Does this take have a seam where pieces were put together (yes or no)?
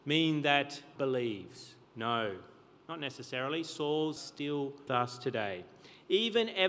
yes